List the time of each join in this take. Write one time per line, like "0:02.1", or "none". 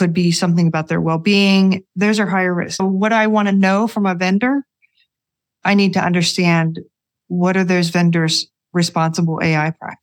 0:02.8